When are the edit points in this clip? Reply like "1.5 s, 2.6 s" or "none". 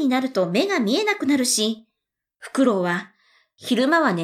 none